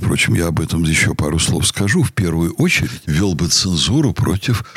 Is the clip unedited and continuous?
yes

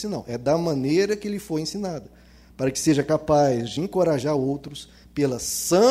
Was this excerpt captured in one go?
yes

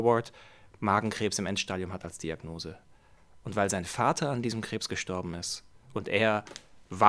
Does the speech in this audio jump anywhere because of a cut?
no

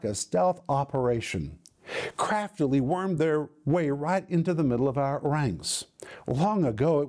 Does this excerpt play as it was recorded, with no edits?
yes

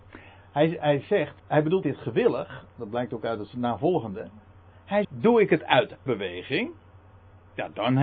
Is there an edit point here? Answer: yes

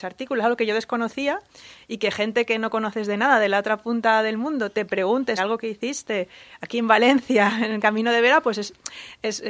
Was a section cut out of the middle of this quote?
yes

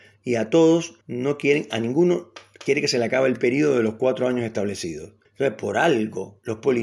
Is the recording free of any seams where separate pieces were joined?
no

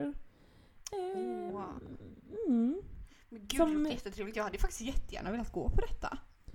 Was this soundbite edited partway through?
no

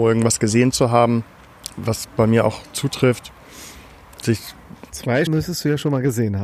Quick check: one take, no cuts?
no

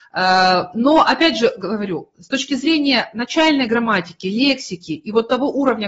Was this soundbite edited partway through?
no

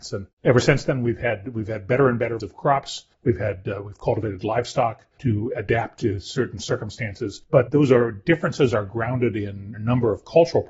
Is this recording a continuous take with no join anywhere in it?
no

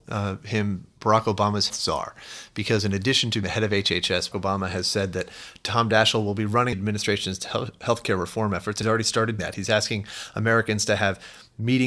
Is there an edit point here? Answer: yes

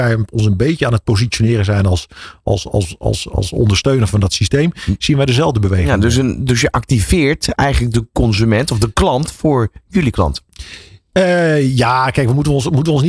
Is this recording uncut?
yes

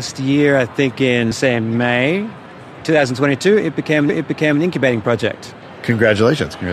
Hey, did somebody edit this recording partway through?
yes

